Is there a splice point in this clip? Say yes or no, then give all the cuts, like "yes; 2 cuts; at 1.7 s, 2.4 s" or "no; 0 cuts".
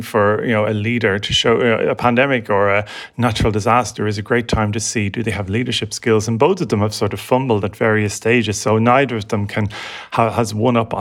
no; 0 cuts